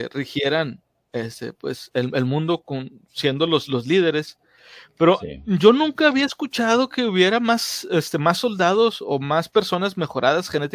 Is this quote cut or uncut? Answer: uncut